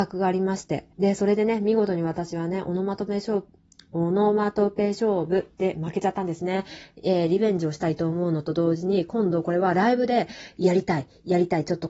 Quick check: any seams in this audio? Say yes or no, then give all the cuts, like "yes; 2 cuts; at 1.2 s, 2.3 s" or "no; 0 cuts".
yes; 2 cuts; at 0.9 s, 3.6 s